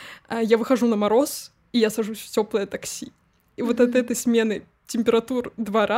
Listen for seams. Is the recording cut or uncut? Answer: uncut